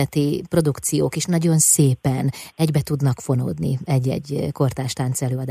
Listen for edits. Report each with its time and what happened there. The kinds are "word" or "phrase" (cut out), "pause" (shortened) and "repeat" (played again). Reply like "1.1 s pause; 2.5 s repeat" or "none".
none